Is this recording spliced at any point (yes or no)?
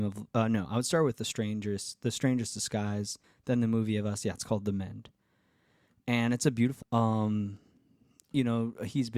yes